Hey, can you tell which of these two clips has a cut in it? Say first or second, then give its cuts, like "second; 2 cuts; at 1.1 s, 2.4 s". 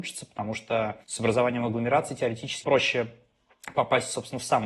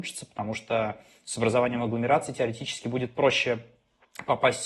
first; 2 cuts; at 1.0 s, 2.6 s